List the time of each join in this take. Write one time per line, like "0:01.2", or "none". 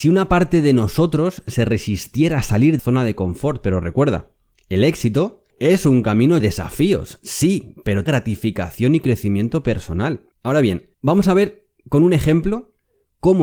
0:02.8
0:05.5
0:06.4
0:08.1
0:10.3
0:10.9